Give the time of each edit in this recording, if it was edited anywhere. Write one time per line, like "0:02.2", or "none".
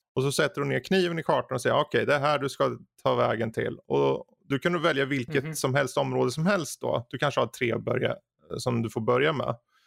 none